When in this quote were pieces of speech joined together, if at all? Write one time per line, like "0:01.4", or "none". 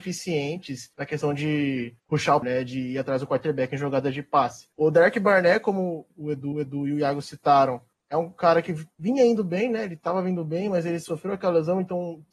0:00.9
0:02.0
0:02.4
0:04.7
0:06.1
0:06.5
0:07.9
0:08.9